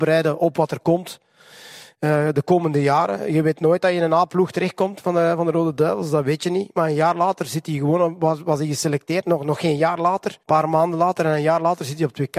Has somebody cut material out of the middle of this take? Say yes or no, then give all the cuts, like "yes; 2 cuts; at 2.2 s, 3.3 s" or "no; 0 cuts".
yes; 1 cut; at 10.4 s